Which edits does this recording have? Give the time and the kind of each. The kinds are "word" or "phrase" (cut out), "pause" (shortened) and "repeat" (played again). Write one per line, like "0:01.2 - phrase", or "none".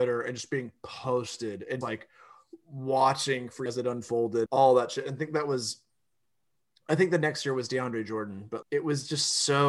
0:01.8 - word
0:03.7 - word
0:04.5 - word
0:08.6 - word

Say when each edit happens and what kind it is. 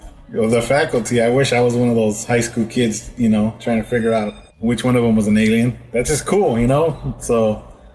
0:04.5 - pause

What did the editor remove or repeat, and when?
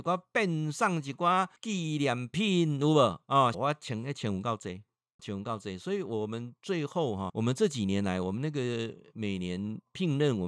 0:01.6 - pause
0:03.5 - phrase
0:05.2 - word
0:07.3 - word

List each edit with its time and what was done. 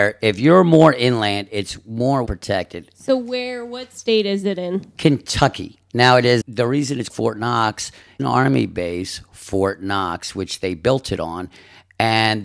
0:02.3 - word
0:06.4 - word
0:07.1 - word
0:08.2 - phrase

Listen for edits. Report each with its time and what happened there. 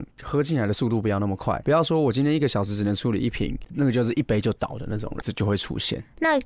0:01.6 - word
0:05.2 - phrase

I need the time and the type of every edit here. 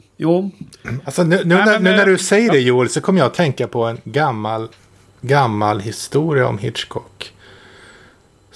none

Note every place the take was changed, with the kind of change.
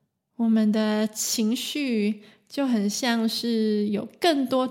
none

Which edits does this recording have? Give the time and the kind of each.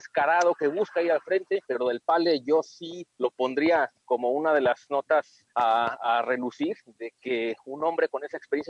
0:01.6 - pause
0:03.1 - pause
0:05.5 - pause

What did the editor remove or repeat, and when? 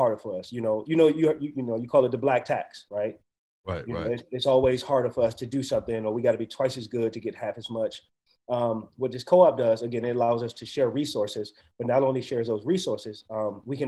none

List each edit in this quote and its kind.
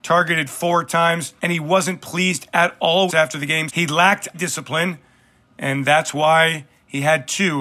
0:01.4 - pause
0:03.1 - phrase
0:03.7 - word
0:04.3 - word

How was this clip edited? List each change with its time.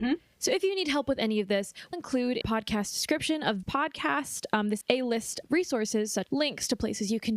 0:01.9 - word
0:02.4 - word
0:03.6 - word
0:04.8 - word
0:05.4 - word
0:06.3 - word

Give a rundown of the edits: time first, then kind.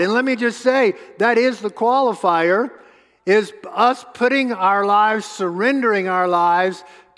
none

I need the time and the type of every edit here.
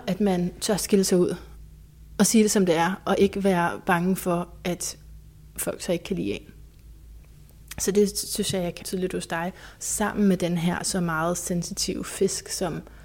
0:08.8 - word

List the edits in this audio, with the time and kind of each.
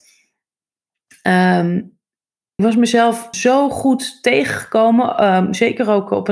0:02.6 - word
0:03.3 - word

